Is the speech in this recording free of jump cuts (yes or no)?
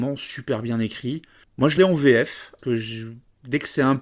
no